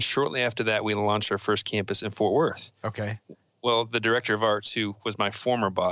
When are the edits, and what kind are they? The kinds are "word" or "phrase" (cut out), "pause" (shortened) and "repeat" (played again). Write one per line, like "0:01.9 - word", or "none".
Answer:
none

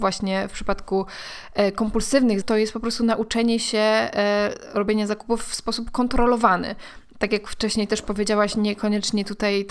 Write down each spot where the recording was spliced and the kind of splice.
0:02.4 - word

